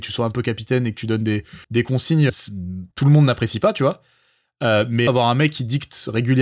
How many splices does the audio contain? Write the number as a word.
four